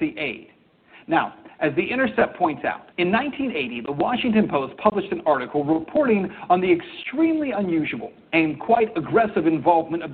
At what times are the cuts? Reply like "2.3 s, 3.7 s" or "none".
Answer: 2.9 s